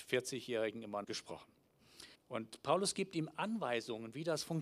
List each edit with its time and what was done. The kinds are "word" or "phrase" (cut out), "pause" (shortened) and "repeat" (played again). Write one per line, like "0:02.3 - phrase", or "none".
0:01.0 - phrase
0:02.2 - pause